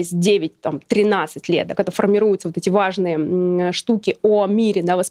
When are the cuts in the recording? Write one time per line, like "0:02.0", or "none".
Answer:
none